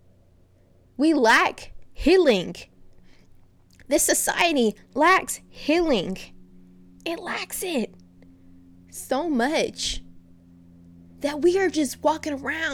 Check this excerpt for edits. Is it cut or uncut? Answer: uncut